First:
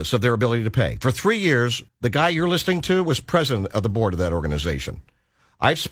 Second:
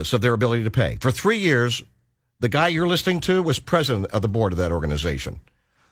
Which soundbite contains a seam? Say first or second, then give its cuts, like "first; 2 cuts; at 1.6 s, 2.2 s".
first; 1 cut; at 1.9 s